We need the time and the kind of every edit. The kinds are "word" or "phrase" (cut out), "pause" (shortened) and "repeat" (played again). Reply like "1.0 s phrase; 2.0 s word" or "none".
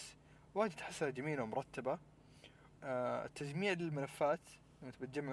2.7 s word